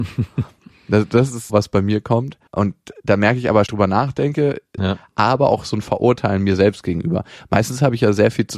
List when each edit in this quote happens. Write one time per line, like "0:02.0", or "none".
0:01.5
0:02.5
0:03.7
0:04.8